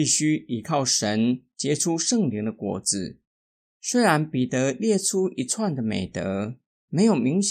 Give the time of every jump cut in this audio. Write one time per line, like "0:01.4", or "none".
none